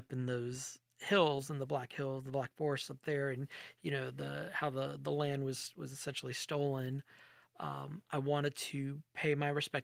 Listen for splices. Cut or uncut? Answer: uncut